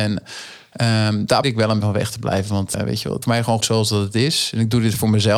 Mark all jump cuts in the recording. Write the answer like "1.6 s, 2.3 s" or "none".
1.4 s, 1.8 s, 2.7 s, 3.2 s, 3.6 s